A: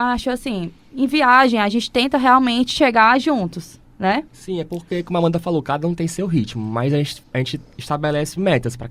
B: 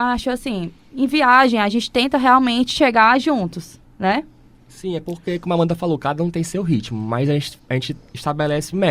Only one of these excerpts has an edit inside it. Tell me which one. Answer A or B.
A